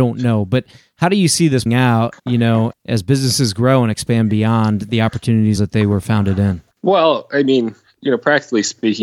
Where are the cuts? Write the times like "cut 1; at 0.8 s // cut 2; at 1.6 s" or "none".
cut 1; at 1.7 s // cut 2; at 2.2 s // cut 3; at 2.7 s // cut 4; at 5.6 s // cut 5; at 6.7 s